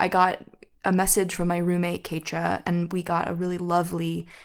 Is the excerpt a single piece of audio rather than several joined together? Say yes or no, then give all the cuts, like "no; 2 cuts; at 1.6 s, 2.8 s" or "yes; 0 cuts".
yes; 0 cuts